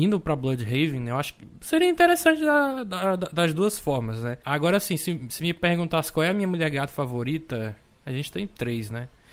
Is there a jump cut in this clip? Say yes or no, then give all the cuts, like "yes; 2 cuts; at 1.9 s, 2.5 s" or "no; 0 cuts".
no; 0 cuts